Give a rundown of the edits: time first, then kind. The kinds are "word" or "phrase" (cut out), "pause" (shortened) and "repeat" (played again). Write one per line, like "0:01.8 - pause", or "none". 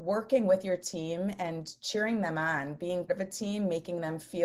0:03.1 - word